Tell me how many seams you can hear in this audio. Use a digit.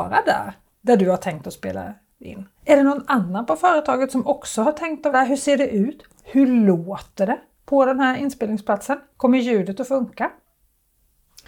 2